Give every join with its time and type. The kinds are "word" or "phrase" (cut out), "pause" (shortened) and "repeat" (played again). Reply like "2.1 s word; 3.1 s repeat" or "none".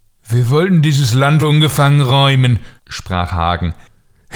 1.4 s word; 2.8 s pause